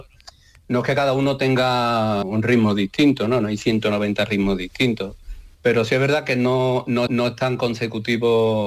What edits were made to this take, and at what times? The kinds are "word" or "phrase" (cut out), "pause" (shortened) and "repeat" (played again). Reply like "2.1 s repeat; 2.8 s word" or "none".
2.2 s word; 5.5 s pause; 7.1 s repeat